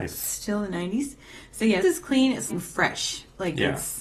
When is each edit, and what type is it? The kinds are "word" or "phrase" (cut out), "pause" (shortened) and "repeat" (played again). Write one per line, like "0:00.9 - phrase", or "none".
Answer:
0:01.8 - word
0:02.5 - word